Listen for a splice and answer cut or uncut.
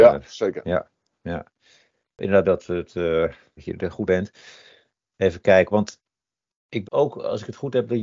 cut